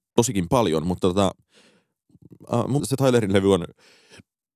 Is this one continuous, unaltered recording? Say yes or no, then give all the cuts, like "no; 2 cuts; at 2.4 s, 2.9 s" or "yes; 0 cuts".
no; 1 cut; at 2.8 s